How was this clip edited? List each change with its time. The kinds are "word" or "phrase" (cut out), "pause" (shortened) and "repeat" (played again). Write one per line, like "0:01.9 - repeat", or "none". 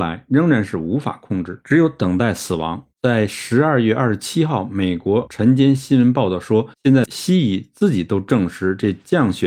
0:02.9 - pause
0:06.7 - pause